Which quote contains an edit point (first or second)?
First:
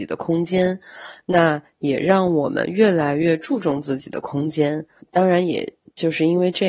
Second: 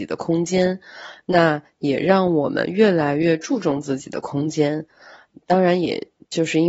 first